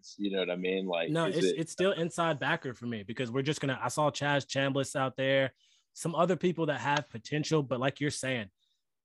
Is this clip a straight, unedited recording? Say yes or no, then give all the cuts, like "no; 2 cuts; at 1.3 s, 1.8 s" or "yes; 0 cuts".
yes; 0 cuts